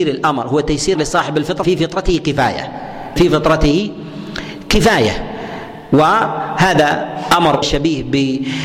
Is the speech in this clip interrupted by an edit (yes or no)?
yes